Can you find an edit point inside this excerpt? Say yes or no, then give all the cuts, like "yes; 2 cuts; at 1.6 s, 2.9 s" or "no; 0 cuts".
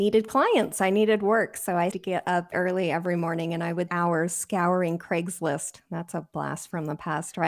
yes; 3 cuts; at 1.9 s, 2.5 s, 3.9 s